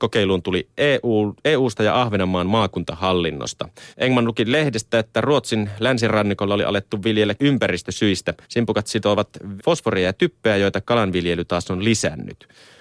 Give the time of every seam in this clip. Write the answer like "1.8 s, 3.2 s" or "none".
3.9 s, 7.4 s, 8.4 s, 9.6 s